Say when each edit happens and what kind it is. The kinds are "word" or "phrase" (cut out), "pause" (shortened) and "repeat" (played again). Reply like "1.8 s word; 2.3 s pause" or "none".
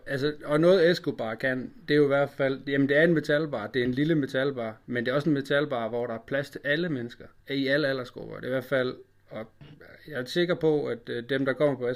7.4 s pause